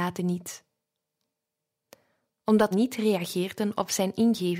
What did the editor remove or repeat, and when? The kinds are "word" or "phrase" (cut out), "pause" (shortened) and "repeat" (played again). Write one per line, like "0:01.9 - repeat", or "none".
0:02.7 - word